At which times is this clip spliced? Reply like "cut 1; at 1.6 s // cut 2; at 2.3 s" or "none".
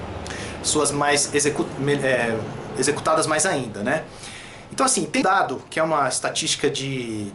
cut 1; at 0.9 s // cut 2; at 5.2 s